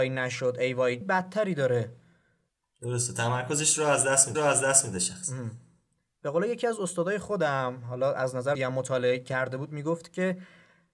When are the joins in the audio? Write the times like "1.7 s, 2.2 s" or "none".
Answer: 1.0 s, 4.3 s, 8.5 s